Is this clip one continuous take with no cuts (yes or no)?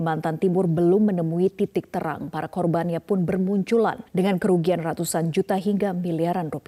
no